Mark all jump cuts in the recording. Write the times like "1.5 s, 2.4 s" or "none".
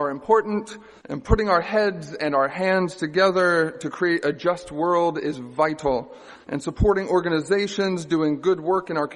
1.0 s, 6.4 s